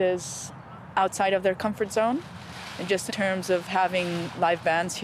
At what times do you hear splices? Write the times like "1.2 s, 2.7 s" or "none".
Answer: 3.1 s